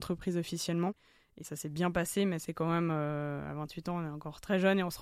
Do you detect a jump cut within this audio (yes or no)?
no